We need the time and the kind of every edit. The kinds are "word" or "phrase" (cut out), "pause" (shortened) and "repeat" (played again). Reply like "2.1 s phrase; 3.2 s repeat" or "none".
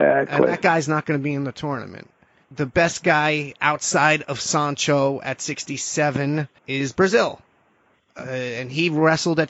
6.6 s pause